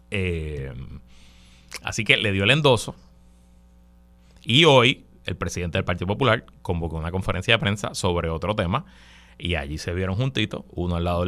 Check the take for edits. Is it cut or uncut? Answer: uncut